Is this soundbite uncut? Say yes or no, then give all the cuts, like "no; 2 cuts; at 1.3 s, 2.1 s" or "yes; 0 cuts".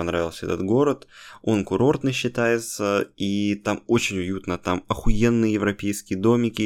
yes; 0 cuts